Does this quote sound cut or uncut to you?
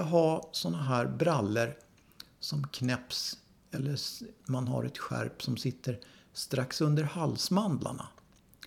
uncut